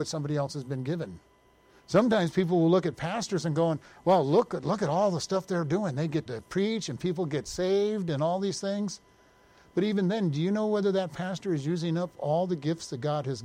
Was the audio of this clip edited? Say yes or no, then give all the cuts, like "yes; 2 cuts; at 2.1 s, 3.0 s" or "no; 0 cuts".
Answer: yes; 1 cut; at 6.3 s